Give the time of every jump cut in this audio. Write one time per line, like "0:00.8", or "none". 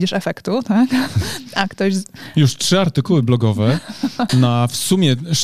0:04.3